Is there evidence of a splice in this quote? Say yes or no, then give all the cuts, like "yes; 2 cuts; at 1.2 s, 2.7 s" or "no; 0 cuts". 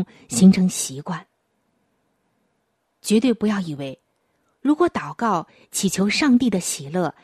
no; 0 cuts